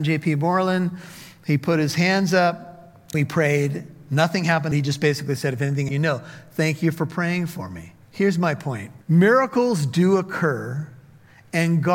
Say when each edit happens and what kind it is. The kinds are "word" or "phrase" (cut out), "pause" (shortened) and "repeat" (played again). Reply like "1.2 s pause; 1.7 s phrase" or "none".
3.1 s word; 4.7 s phrase; 5.9 s phrase; 8.0 s pause; 9.0 s pause